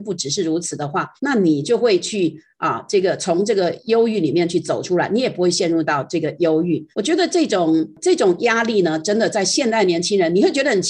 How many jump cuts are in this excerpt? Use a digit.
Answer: 2